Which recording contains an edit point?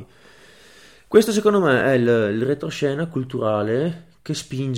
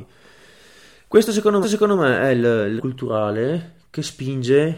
second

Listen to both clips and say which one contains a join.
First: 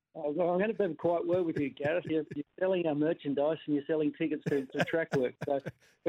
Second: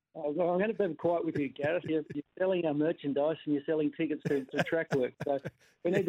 second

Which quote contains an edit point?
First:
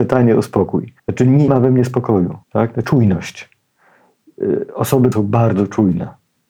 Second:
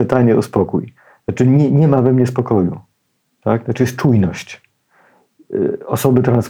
first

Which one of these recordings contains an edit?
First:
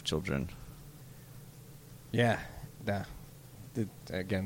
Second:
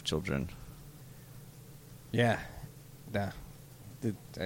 first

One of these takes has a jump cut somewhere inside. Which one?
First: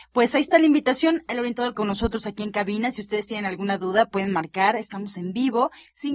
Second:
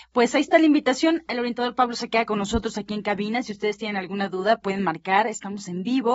first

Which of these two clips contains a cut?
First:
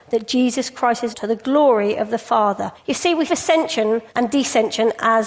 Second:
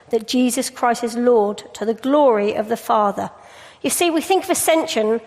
first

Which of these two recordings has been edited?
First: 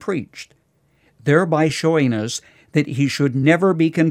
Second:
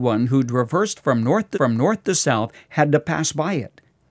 second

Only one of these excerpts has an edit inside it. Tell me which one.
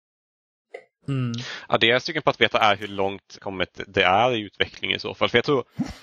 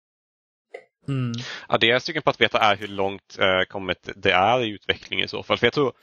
first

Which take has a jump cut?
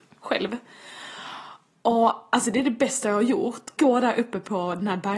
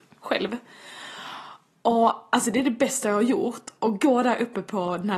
first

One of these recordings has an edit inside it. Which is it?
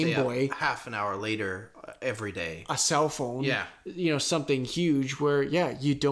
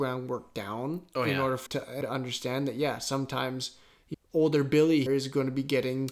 second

